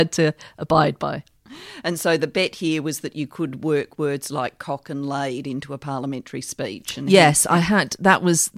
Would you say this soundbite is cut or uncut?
uncut